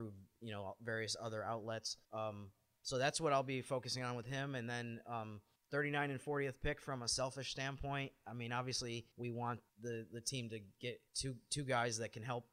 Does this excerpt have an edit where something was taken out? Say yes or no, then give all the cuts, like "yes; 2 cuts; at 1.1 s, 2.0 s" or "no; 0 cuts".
yes; 5 cuts; at 2.0 s, 5.6 s, 9.1 s, 9.7 s, 11.1 s